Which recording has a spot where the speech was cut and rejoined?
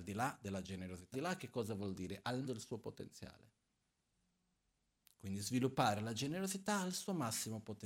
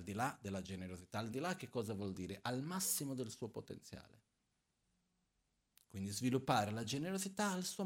first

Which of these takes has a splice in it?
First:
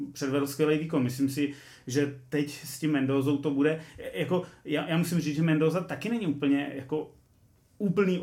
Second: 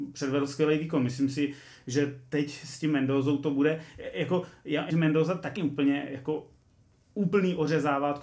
second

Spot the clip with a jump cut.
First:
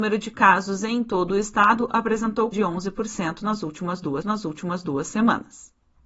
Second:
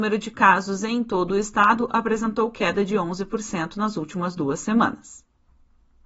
first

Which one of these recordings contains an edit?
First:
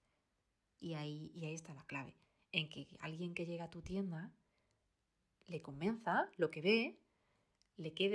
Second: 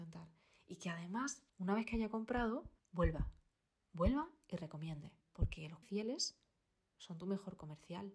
second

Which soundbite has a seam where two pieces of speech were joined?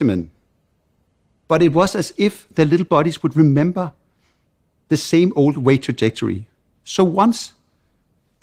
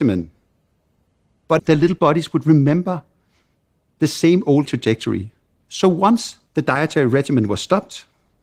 second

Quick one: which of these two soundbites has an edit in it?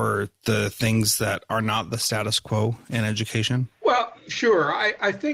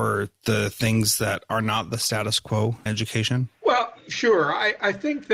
second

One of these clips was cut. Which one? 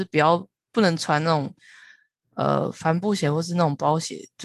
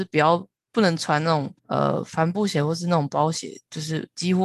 second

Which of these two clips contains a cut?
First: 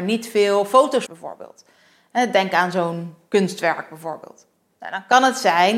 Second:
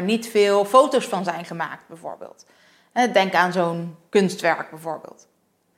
first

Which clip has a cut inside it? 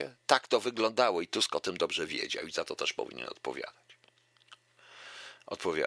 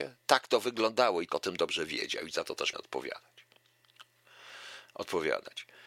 second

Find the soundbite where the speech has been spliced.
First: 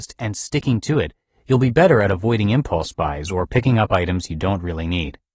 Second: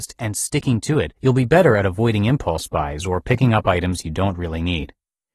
second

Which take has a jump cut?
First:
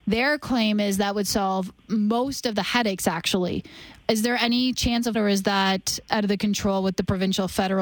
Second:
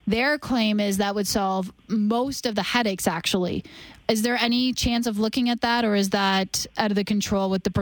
first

